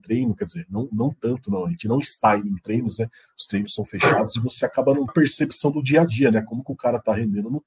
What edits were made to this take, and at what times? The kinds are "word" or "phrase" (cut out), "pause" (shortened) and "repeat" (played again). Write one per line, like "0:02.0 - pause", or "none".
0:05.1 - phrase